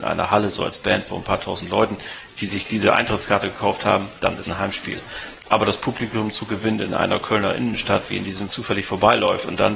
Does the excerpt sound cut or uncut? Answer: cut